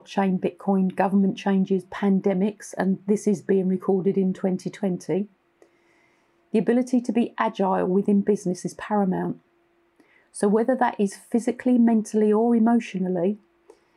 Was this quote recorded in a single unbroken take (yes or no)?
yes